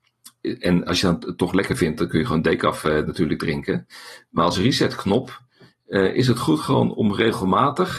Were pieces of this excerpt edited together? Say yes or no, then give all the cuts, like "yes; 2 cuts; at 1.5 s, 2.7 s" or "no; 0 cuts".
no; 0 cuts